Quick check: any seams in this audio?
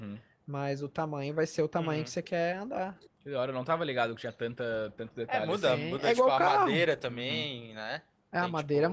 yes; 1 cut; at 3.1 s

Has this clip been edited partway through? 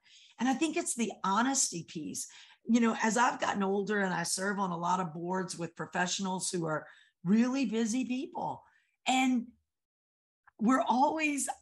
no; 0 cuts

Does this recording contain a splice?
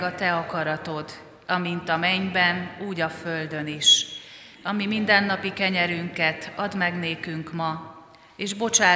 no; 0 cuts

